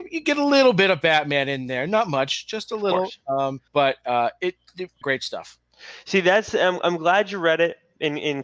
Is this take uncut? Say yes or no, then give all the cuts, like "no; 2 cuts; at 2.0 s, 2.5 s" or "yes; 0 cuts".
no; 2 cuts; at 3.7 s, 5.0 s